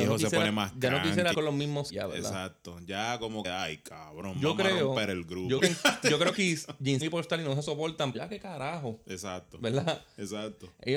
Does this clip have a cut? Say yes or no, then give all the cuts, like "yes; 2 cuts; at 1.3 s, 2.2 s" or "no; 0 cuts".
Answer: yes; 7 cuts; at 1.3 s, 1.9 s, 3.4 s, 5.6 s, 6.3 s, 7.0 s, 8.1 s